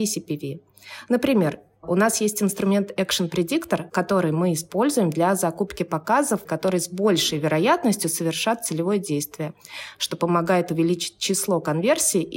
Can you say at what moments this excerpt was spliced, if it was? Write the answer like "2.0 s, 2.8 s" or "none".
3.9 s, 6.5 s